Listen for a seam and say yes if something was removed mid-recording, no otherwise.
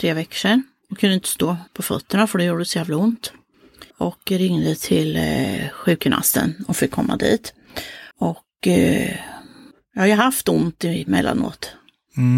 yes